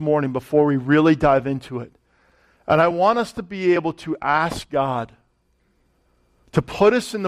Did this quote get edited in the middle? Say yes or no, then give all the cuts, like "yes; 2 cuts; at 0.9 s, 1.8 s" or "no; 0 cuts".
no; 0 cuts